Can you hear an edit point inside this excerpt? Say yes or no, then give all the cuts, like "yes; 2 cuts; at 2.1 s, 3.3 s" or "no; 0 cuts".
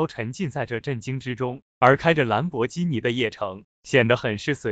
yes; 1 cut; at 1.7 s